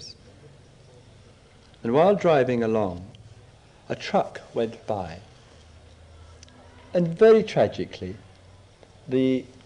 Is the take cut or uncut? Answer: uncut